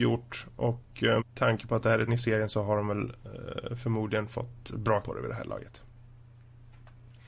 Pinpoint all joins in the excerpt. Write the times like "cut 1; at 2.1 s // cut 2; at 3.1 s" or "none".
cut 1; at 1.2 s // cut 2; at 2.1 s // cut 3; at 5.0 s